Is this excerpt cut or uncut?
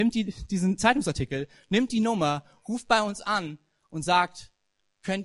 uncut